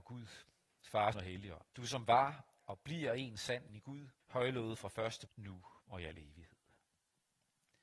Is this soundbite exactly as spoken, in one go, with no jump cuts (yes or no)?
no